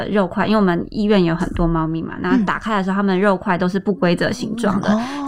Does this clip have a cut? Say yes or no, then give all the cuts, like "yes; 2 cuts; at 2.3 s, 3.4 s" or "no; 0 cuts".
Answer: no; 0 cuts